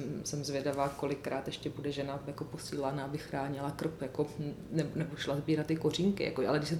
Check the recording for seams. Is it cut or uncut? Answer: uncut